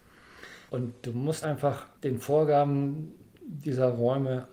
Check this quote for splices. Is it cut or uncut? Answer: cut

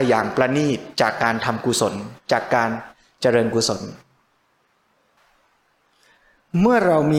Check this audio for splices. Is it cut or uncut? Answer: uncut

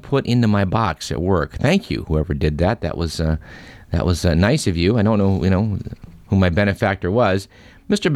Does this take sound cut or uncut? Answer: uncut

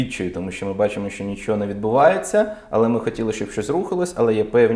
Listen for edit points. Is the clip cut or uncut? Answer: uncut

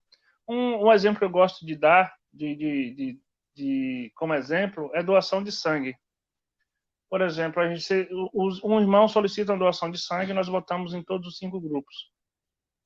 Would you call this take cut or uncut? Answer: uncut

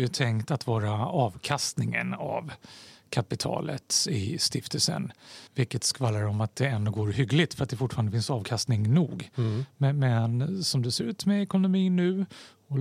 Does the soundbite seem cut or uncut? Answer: cut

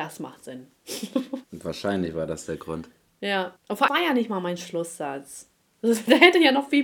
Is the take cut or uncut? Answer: cut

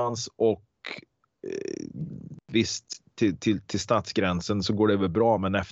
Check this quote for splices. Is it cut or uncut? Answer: uncut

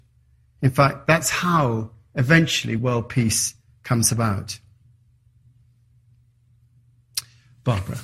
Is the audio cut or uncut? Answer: uncut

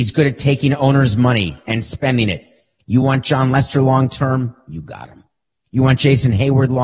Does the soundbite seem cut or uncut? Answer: uncut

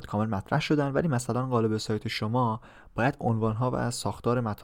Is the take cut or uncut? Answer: uncut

